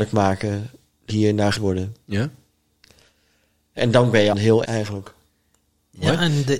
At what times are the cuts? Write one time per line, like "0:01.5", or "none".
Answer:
0:01.1
0:01.6
0:03.8
0:04.3
0:04.6